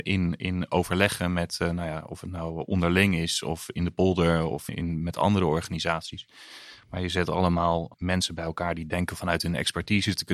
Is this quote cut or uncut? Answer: cut